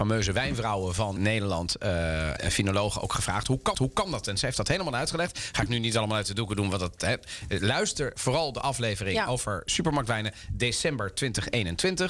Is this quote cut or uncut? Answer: cut